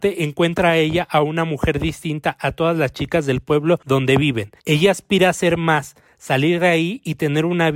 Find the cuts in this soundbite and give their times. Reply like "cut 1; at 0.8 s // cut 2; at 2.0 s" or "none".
cut 1; at 4.6 s